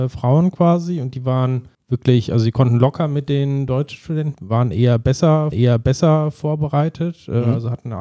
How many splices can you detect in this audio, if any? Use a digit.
3